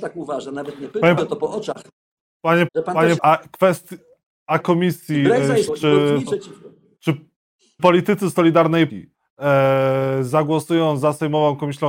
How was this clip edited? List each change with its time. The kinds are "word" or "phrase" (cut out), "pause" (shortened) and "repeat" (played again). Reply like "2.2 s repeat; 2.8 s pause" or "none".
1.2 s word; 2.7 s word; 3.2 s word; 4.6 s word; 5.7 s word; 6.3 s word; 7.8 s word; 8.9 s word